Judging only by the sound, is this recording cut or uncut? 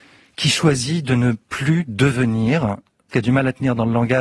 cut